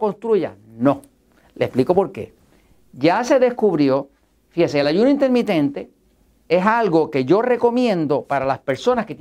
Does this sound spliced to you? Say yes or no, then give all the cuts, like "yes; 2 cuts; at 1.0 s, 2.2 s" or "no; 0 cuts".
no; 0 cuts